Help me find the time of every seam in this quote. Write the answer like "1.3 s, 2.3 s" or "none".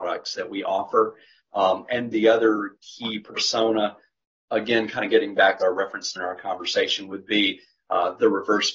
2.1 s, 5.6 s, 6.2 s